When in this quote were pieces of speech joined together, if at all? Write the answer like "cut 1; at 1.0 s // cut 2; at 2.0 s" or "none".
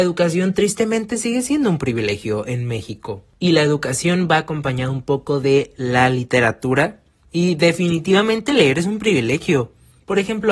none